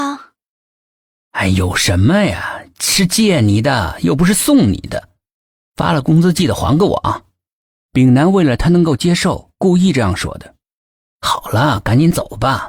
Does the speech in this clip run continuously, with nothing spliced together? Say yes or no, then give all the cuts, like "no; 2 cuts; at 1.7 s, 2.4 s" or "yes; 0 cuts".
yes; 0 cuts